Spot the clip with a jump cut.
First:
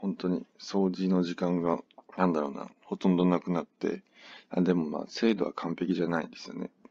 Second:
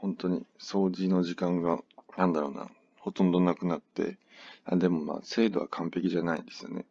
first; 1 cut; at 2.7 s

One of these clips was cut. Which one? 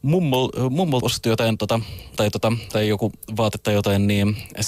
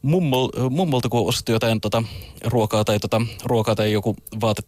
first; 3 cuts; at 1.0 s, 2.2 s, 2.7 s

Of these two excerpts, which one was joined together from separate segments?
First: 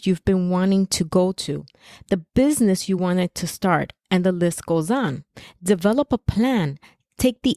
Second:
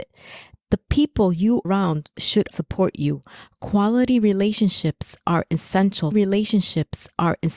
second; 3 cuts; at 1.6 s, 2.5 s, 6.1 s

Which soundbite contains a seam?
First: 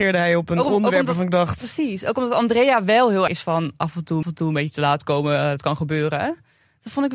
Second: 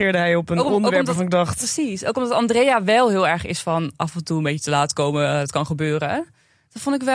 first; 2 cuts; at 3.3 s, 4.2 s

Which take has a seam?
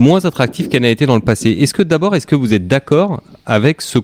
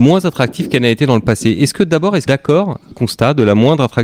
second; 2 cuts; at 2.3 s, 2.9 s

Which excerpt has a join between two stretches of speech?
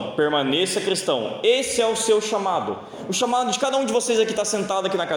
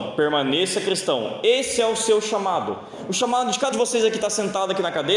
second; 1 cut; at 3.7 s

